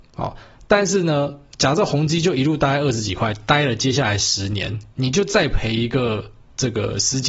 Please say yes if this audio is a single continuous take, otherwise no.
no